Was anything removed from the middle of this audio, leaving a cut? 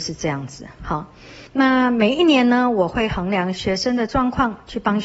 yes; 1 cut; at 1.5 s

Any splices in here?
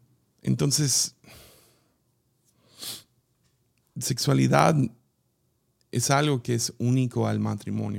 no; 0 cuts

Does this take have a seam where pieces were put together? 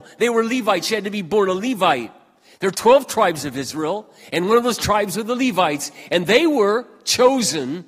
no; 0 cuts

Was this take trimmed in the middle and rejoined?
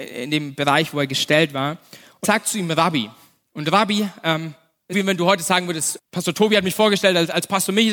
yes; 3 cuts; at 2.2 s, 4.9 s, 6.0 s

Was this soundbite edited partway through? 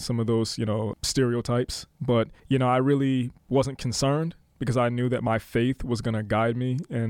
yes; 3 cuts; at 0.9 s, 2.4 s, 3.4 s

